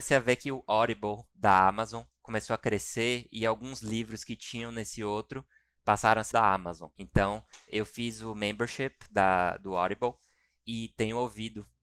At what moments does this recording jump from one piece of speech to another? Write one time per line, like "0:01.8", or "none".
0:06.3